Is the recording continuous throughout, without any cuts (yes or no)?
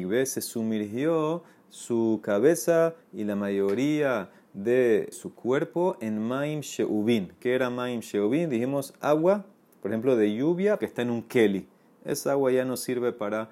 no